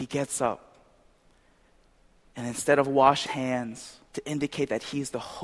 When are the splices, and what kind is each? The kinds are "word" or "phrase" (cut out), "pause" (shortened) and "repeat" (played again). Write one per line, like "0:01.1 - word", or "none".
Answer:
0:03.3 - word
0:04.1 - pause